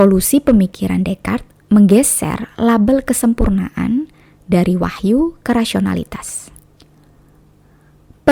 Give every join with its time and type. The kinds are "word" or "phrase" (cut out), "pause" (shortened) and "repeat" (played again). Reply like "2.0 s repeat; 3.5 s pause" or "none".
none